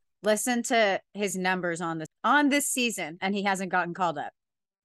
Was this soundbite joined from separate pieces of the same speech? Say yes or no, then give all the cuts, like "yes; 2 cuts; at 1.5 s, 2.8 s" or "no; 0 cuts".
yes; 1 cut; at 2.1 s